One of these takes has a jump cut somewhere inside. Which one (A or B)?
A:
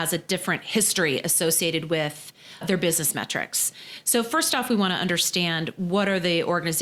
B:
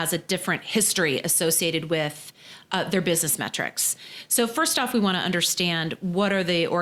A